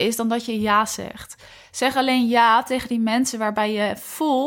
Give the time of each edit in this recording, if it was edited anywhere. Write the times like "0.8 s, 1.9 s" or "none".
none